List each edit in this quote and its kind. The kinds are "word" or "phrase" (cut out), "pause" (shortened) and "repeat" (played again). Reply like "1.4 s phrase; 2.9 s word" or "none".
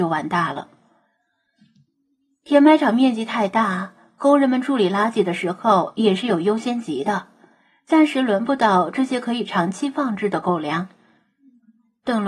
none